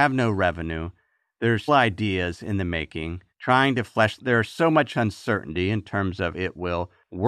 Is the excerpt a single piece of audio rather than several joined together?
no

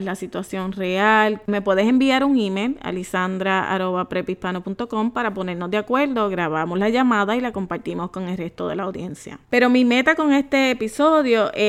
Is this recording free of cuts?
no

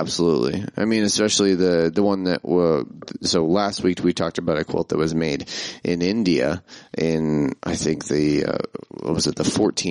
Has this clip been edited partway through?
yes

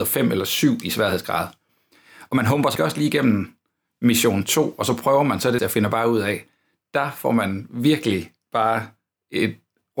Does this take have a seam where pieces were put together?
yes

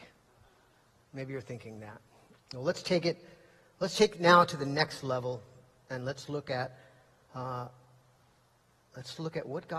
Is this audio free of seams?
yes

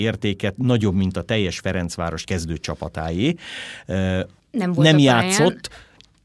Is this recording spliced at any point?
yes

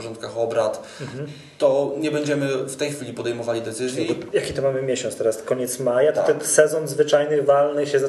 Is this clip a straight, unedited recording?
yes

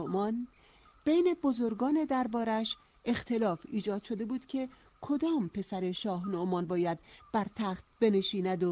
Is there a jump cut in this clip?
no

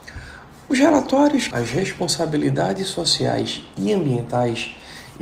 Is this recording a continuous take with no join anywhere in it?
no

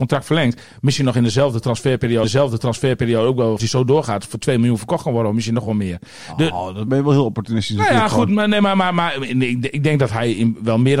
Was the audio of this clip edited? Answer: yes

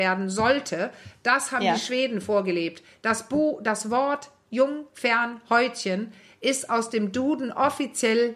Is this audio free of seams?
yes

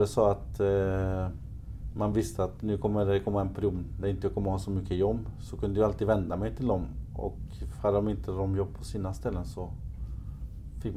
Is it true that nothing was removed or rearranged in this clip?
yes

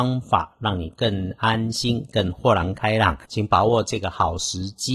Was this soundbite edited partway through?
yes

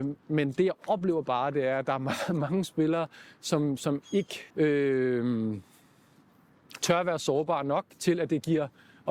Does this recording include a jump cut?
yes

